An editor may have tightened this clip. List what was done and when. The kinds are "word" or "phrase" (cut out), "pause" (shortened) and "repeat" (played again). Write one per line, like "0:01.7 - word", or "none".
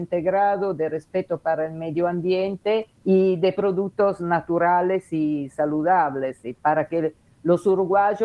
0:02.9 - pause

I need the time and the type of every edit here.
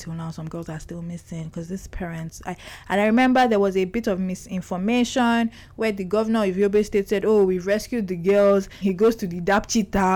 0:08.8 - word

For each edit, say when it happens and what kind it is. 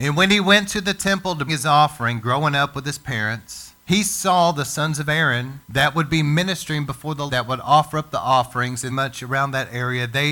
0:01.5 - word
0:03.8 - pause
0:05.6 - pause
0:07.3 - word
0:08.9 - phrase

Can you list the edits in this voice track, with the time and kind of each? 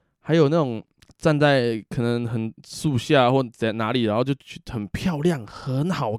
0:01.0 - pause

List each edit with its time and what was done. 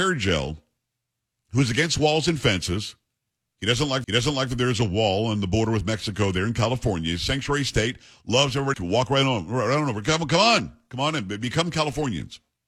0:04.0 - repeat
0:08.7 - word

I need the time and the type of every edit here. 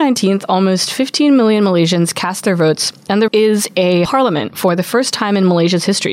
0:03.3 - word
0:04.0 - word

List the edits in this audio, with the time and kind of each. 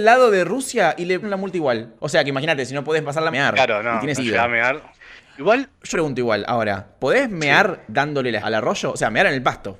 0:01.2 - word
0:02.0 - pause
0:03.3 - phrase
0:04.2 - word
0:05.9 - word
0:08.4 - word

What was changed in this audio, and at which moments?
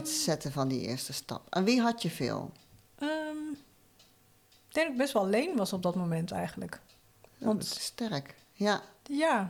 none

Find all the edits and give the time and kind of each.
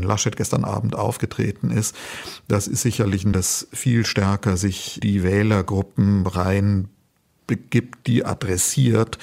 0:03.3 - word
0:05.0 - word

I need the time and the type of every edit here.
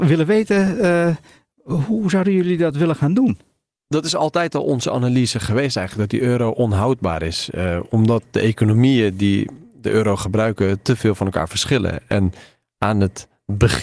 none

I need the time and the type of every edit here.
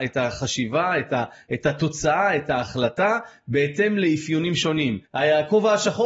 0:05.1 - pause

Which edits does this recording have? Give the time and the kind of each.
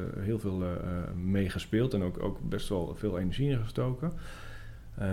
none

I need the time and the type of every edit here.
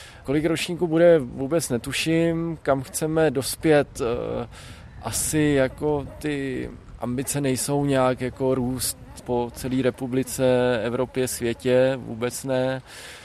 none

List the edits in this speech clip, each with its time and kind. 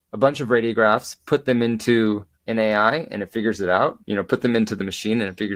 0:02.3 - pause
0:04.0 - pause

